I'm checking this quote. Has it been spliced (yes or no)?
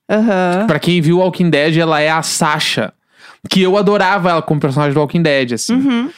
no